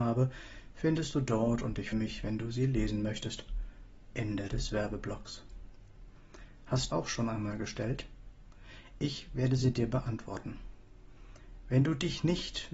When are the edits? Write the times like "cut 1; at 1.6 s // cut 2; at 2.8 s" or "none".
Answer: cut 1; at 1.9 s // cut 2; at 6.9 s